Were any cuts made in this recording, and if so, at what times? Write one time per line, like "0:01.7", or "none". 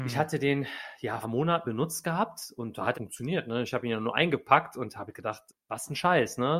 0:01.2
0:01.6
0:02.9
0:05.5